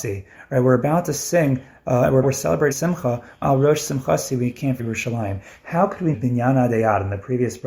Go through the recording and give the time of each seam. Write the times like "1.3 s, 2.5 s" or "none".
2.2 s, 2.7 s, 3.4 s, 4.8 s, 6.1 s